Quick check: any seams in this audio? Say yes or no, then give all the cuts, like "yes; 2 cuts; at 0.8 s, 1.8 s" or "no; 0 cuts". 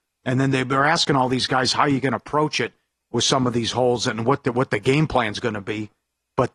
no; 0 cuts